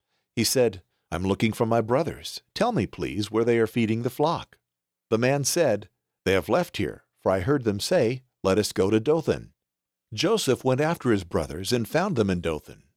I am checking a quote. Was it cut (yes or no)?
no